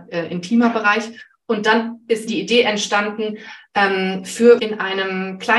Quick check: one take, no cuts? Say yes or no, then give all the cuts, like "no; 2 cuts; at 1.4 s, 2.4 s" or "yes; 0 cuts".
no; 2 cuts; at 2.3 s, 4.6 s